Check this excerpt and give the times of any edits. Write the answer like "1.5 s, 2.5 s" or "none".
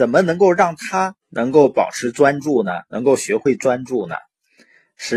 1.2 s